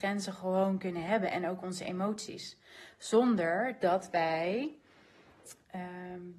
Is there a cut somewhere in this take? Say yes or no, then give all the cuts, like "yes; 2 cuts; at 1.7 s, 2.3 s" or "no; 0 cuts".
no; 0 cuts